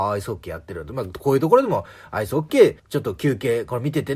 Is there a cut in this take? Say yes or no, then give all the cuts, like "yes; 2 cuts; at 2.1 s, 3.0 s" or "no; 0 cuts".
yes; 1 cut; at 2.8 s